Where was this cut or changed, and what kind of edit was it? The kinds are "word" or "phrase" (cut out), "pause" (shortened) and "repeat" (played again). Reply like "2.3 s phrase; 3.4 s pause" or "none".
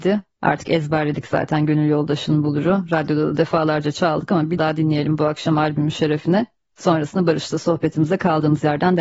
4.6 s word